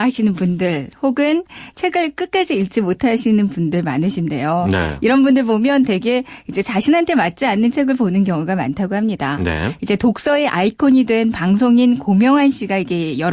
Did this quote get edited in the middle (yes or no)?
no